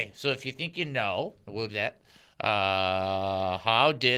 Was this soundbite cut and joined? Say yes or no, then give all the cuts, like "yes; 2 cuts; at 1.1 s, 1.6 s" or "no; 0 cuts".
yes; 1 cut; at 1.7 s